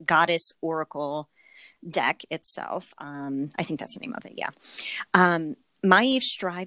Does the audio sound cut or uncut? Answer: uncut